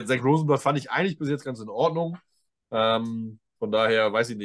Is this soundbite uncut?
yes; 0 cuts

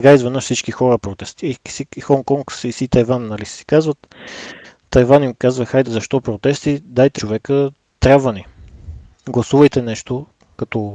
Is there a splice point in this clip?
yes; 2 cuts; at 5.8 s, 7.2 s

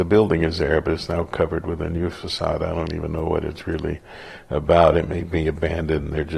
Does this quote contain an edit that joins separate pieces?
no; 0 cuts

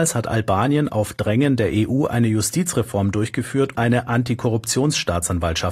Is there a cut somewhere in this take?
yes; 1 cut; at 3.7 s

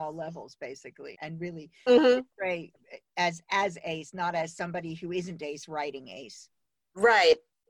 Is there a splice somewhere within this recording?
yes; 1 cut; at 1.1 s

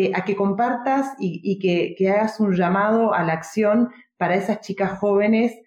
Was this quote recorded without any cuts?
yes; 0 cuts

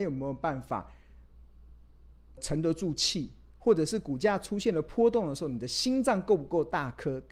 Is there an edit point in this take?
yes; 1 cut; at 2.4 s

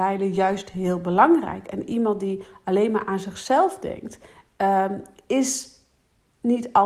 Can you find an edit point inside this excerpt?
no; 0 cuts

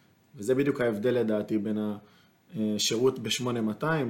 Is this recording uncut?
yes; 0 cuts

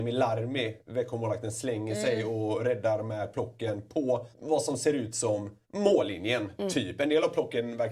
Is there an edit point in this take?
yes; 2 cuts; at 4.3 s, 5.6 s

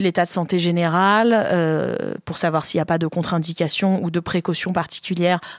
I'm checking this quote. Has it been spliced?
no; 0 cuts

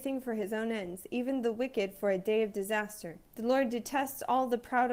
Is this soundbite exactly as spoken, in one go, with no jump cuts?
no; 1 cut; at 3.3 s

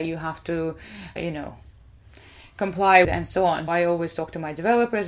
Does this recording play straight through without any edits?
no; 3 cuts; at 1.2 s, 3.0 s, 3.7 s

